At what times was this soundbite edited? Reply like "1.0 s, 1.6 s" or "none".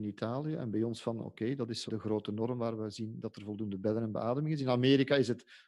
1.9 s